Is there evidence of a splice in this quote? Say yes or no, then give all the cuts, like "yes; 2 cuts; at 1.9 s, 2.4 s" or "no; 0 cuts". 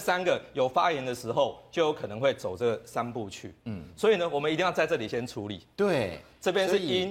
yes; 1 cut; at 5.7 s